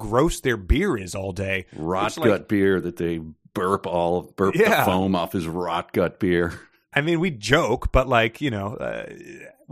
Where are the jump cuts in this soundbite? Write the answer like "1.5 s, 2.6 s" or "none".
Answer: none